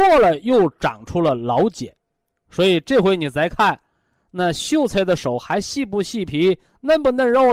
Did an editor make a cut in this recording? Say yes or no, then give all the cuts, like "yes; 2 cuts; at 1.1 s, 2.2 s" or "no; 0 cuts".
no; 0 cuts